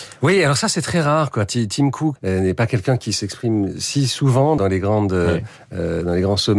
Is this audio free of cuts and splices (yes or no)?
no